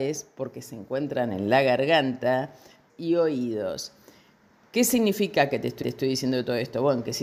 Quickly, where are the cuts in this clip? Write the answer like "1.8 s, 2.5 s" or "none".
2.9 s, 5.8 s